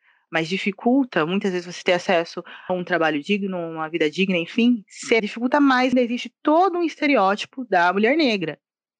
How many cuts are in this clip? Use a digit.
3